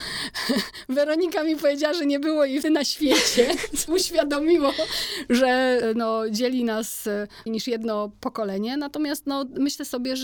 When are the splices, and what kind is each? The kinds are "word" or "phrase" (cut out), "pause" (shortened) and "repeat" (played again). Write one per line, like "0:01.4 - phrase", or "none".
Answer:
0:02.6 - word
0:03.9 - word
0:05.8 - word
0:07.5 - word